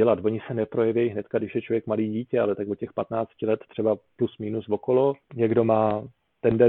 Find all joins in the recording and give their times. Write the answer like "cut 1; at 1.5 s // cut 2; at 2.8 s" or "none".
cut 1; at 5.2 s